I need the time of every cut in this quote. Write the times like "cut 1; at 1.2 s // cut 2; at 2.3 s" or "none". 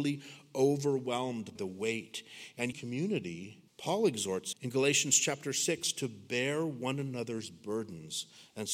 cut 1; at 1.6 s // cut 2; at 2.7 s // cut 3; at 3.7 s // cut 4; at 4.5 s